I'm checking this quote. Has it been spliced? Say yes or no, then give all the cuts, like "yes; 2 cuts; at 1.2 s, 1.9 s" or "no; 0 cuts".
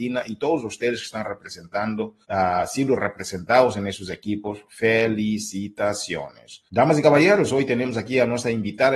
yes; 2 cuts; at 2.2 s, 6.7 s